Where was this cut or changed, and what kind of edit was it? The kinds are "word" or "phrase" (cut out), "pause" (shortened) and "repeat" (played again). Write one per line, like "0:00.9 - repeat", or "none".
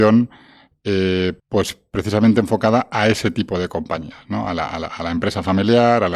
0:01.4 - pause